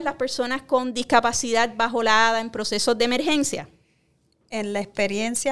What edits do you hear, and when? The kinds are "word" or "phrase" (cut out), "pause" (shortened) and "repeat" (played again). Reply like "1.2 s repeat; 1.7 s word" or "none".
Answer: none